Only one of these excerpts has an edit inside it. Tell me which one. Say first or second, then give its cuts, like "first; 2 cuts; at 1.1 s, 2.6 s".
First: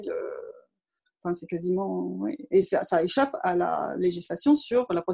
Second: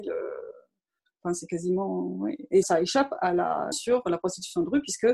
second; 2 cuts; at 2.6 s, 3.7 s